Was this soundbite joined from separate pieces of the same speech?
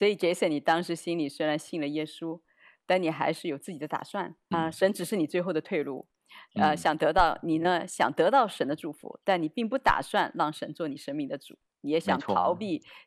yes; 1 cut; at 4.5 s

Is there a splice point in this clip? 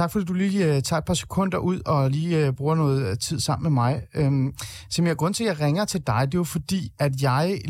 no; 0 cuts

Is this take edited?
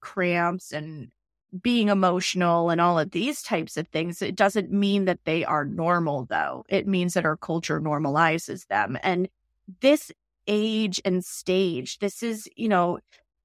no; 0 cuts

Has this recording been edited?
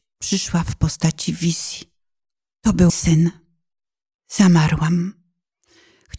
yes; 1 cut; at 2.9 s

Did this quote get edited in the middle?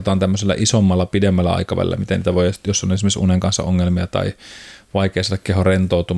no; 0 cuts

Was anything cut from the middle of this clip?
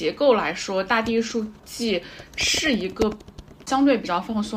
yes; 1 cut; at 1.6 s

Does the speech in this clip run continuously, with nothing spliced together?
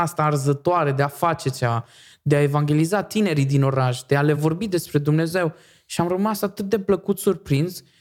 yes; 0 cuts

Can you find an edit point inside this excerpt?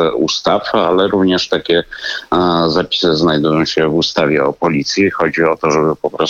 no; 0 cuts

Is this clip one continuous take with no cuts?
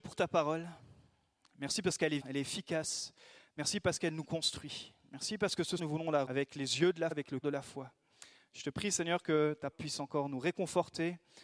no; 6 cuts; at 2.2 s, 5.8 s, 6.3 s, 7.1 s, 7.4 s, 9.7 s

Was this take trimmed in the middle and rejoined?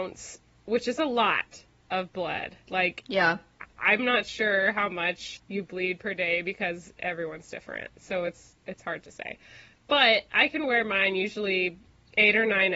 no; 0 cuts

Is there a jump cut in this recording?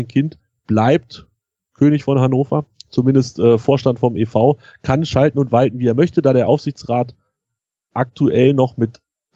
no; 0 cuts

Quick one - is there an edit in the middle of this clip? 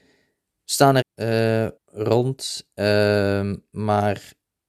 yes; 2 cuts; at 1.0 s, 1.8 s

